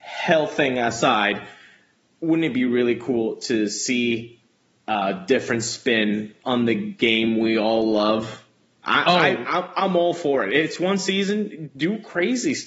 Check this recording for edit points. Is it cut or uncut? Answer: uncut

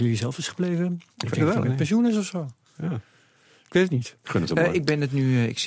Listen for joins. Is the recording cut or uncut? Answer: uncut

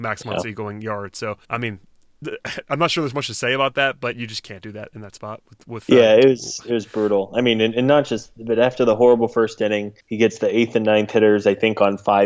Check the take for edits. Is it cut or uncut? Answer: cut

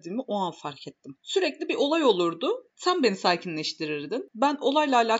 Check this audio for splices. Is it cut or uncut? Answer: uncut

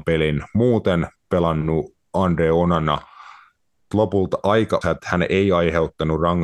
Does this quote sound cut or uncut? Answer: cut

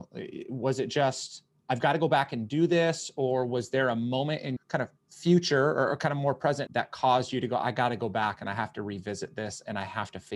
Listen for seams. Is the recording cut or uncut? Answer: cut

